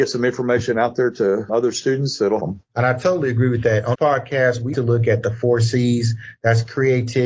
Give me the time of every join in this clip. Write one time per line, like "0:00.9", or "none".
0:01.5
0:02.4
0:03.9
0:04.7